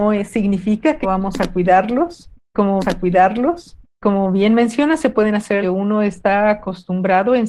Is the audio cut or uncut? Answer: cut